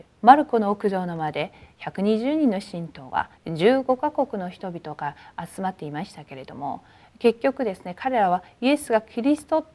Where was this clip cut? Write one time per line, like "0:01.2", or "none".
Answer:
0:03.4